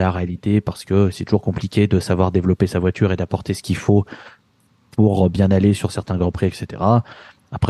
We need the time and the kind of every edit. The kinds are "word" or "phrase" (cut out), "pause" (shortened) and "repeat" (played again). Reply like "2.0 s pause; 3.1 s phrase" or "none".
none